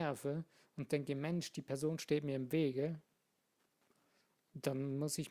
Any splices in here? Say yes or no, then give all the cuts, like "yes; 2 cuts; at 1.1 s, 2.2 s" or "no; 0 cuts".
no; 0 cuts